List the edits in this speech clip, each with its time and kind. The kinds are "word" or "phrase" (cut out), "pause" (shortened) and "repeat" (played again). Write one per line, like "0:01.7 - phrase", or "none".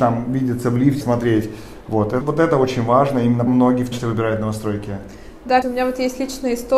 0:01.0 - word
0:02.2 - word
0:03.5 - word
0:03.9 - word
0:05.6 - word

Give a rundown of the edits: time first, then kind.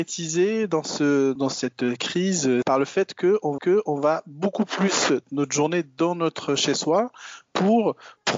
0:01.4 - word
0:02.6 - word
0:03.6 - repeat
0:05.2 - phrase

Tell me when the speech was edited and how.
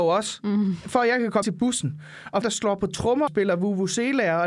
0:01.4 - word
0:02.4 - word
0:03.3 - word

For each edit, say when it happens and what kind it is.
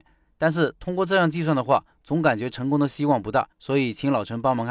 0:03.5 - pause

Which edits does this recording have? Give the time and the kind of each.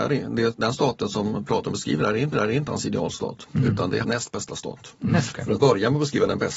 0:02.3 - repeat
0:04.0 - word
0:05.3 - word
0:05.6 - word

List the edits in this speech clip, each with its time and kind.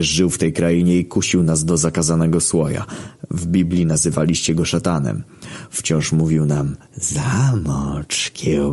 none

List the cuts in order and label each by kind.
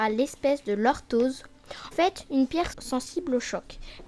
0:01.9 - word
0:02.7 - word

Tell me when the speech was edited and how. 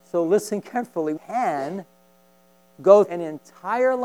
0:01.2 - word
0:03.0 - word

